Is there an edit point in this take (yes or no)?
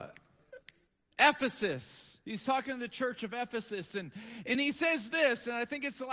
no